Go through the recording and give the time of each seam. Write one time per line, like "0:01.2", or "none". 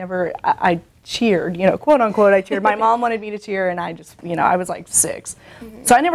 none